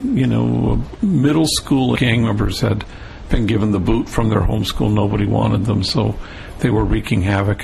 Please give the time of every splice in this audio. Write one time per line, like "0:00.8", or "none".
0:02.0